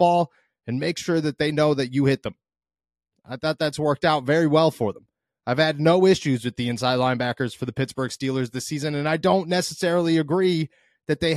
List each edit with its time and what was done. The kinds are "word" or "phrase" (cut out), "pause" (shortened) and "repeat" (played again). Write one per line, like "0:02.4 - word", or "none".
none